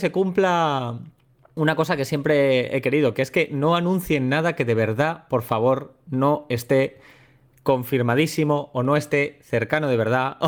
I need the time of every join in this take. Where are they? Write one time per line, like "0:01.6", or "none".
none

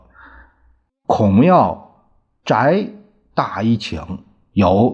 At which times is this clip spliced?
none

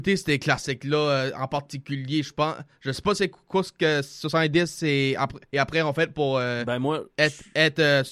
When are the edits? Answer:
0:05.5

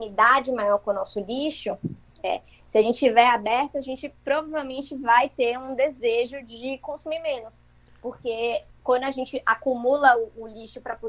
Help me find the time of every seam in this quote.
none

